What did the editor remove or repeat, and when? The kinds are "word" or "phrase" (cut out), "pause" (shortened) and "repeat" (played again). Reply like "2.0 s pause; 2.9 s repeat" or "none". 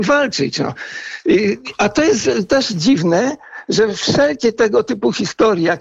none